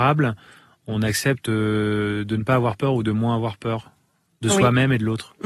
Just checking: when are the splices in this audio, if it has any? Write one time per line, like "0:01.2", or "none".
none